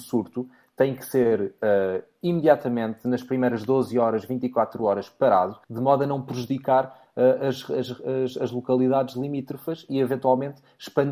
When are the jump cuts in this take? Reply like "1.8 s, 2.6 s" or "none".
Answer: 5.6 s